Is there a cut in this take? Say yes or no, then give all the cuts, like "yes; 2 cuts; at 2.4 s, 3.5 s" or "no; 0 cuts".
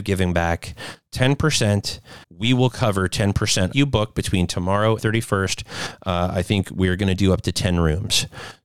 yes; 3 cuts; at 2.2 s, 3.7 s, 5.0 s